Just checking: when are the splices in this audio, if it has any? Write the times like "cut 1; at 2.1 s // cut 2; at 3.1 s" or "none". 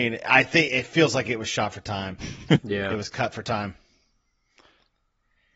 none